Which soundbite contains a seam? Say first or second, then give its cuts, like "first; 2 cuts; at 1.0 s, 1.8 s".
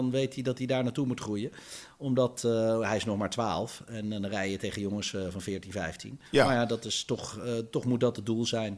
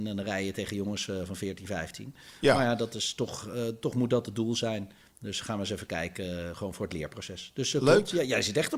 first; 1 cut; at 6.3 s